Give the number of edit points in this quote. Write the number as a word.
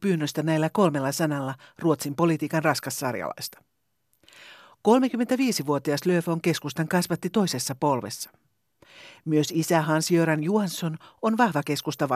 zero